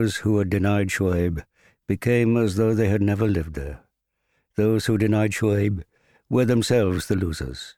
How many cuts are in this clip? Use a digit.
0